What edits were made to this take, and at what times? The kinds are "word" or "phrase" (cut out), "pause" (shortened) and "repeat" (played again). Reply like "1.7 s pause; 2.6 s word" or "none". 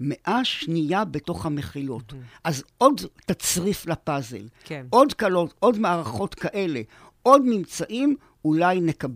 none